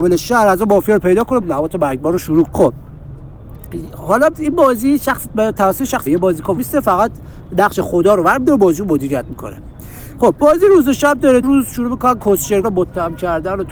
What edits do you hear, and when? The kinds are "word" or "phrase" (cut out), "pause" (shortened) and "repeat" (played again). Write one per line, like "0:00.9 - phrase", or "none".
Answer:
0:01.4 - word
0:02.4 - word
0:04.3 - word
0:06.1 - word
0:06.6 - word
0:11.4 - word
0:12.6 - word